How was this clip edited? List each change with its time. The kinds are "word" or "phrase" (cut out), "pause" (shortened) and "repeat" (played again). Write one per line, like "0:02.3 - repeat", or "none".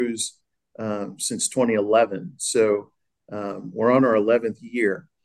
none